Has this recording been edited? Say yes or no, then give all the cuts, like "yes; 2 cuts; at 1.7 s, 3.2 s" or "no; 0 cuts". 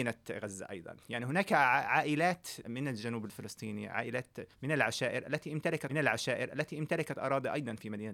yes; 3 cuts; at 2.6 s, 4.5 s, 5.9 s